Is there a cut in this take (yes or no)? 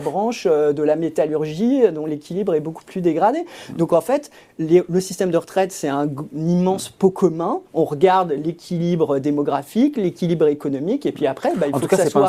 no